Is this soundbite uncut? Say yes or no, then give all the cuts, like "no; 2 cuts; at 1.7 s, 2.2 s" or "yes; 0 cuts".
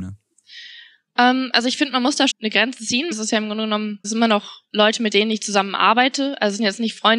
no; 3 cuts; at 2.3 s, 3.1 s, 4.0 s